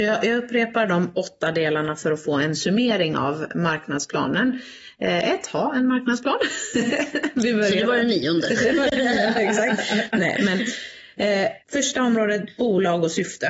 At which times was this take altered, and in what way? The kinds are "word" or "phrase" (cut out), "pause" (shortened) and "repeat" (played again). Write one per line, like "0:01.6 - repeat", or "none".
0:11.6 - pause